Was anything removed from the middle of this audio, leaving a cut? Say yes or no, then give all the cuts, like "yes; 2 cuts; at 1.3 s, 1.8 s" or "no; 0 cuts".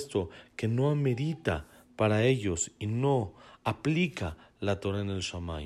no; 0 cuts